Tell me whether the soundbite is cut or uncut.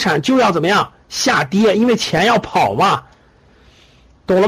uncut